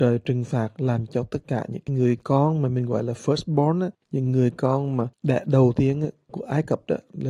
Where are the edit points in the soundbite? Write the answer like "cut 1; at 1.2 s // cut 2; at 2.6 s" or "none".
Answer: cut 1; at 3.9 s